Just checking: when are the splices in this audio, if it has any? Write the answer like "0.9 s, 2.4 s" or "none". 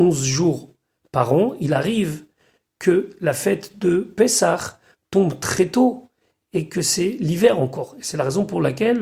none